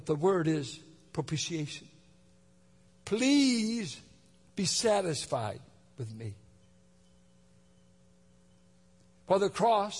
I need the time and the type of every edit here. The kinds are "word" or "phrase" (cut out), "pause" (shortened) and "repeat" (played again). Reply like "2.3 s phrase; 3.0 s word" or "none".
none